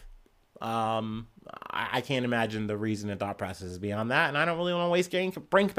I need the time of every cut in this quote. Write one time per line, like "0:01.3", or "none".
none